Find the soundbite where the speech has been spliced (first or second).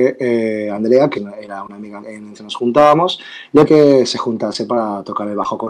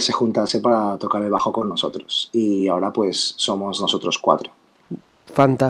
first